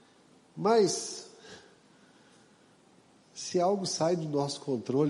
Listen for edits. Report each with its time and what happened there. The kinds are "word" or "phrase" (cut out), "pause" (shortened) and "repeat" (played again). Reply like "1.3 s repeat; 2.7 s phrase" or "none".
none